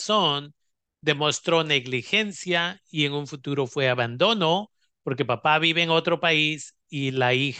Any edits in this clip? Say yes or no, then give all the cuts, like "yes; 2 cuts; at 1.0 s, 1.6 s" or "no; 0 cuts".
no; 0 cuts